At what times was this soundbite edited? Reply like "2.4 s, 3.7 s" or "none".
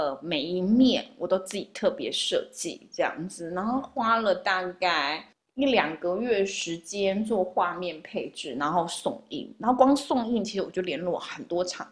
5.3 s

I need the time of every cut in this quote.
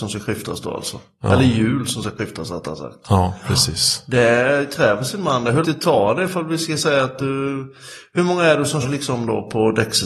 5.6 s, 8.8 s

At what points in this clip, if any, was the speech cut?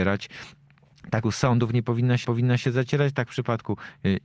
1.2 s, 2.2 s

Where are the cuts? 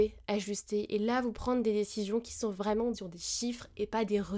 1.3 s, 2.9 s

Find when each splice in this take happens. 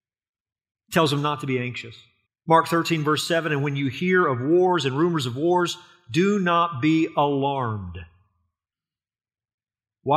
2.3 s

